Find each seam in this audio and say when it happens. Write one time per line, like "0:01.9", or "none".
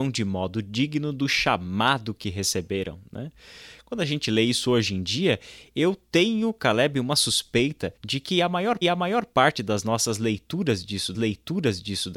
0:08.0
0:08.8
0:11.1